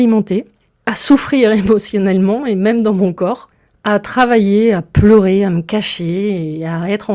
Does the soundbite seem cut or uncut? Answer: uncut